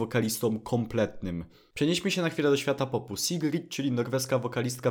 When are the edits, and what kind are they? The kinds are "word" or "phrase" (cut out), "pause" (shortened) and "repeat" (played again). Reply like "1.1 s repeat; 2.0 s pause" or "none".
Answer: none